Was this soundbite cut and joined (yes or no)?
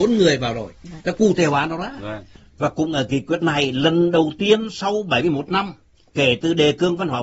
no